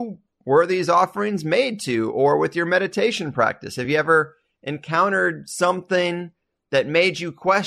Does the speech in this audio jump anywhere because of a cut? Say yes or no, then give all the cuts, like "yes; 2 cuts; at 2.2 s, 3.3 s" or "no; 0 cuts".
no; 0 cuts